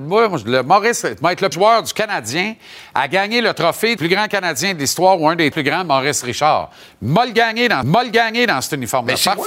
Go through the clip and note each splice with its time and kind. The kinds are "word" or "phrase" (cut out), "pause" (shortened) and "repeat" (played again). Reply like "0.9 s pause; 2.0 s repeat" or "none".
1.5 s word; 4.0 s word; 5.5 s word; 7.8 s repeat